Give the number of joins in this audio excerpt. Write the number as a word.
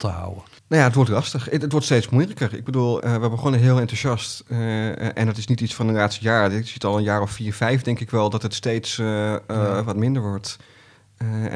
one